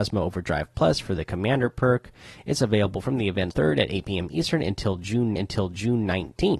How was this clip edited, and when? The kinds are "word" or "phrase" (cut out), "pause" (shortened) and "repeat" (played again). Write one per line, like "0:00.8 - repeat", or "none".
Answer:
0:03.5 - phrase
0:05.4 - repeat